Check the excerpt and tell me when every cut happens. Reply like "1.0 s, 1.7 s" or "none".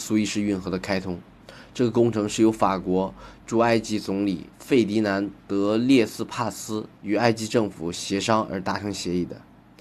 4.5 s, 7.0 s